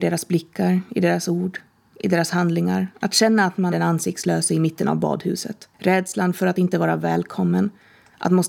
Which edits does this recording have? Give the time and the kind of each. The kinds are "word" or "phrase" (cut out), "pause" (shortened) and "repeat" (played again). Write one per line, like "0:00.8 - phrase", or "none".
0:02.9 - pause
0:03.7 - word
0:05.7 - pause